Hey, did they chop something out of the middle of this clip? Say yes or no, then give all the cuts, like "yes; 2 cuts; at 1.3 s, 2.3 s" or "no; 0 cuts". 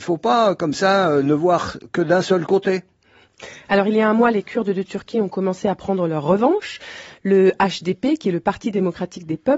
no; 0 cuts